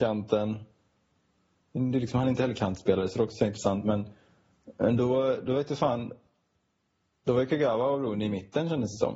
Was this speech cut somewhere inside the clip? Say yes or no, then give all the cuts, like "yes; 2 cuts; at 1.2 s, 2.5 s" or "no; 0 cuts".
no; 0 cuts